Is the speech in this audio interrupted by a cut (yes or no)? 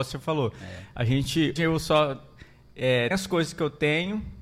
yes